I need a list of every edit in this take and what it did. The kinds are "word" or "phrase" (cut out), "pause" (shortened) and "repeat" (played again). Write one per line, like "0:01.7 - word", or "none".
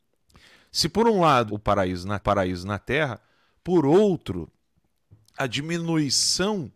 0:01.5 - phrase
0:02.2 - repeat